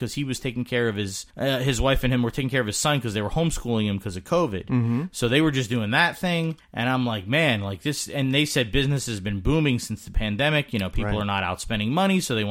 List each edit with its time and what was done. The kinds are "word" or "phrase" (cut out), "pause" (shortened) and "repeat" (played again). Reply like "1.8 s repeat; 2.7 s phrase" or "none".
1.3 s pause; 6.6 s pause